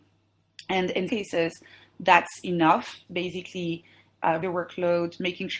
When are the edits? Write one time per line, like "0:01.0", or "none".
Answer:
0:01.1
0:03.1
0:04.4